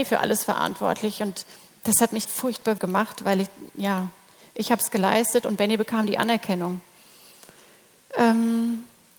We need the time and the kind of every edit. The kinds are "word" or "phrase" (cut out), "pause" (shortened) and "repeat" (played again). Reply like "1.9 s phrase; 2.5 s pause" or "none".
2.2 s word; 2.8 s word